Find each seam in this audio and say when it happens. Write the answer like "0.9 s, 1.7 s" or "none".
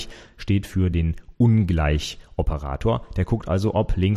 none